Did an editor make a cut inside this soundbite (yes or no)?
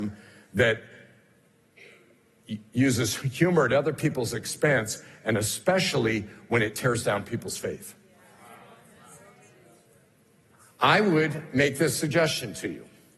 no